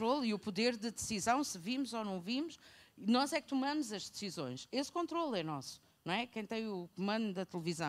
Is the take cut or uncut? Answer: uncut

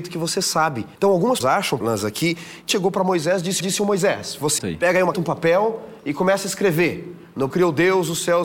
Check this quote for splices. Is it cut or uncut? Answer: cut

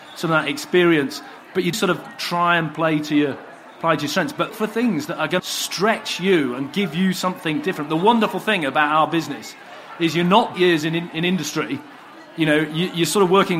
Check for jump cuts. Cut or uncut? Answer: cut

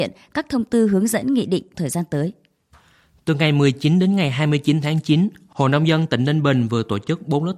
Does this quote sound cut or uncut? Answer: cut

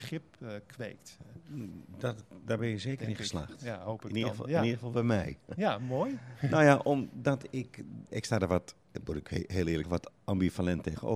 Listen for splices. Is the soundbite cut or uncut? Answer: cut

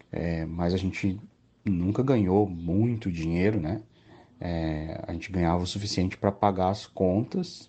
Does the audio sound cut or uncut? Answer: uncut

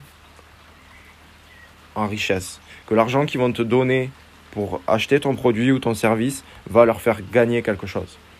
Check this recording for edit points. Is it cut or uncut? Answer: uncut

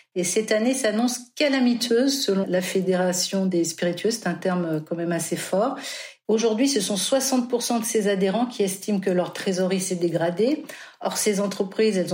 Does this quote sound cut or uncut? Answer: cut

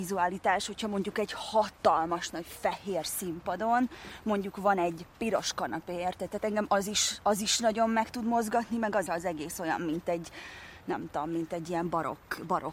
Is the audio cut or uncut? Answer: cut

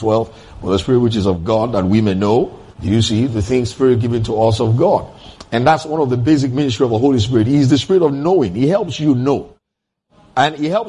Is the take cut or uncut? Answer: cut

